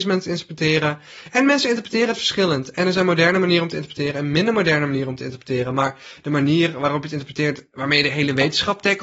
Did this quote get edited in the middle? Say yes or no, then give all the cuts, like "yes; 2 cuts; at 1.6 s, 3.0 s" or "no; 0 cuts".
no; 0 cuts